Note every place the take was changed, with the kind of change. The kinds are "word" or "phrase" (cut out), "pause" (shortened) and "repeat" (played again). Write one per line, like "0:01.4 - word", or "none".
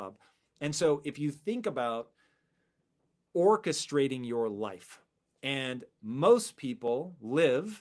none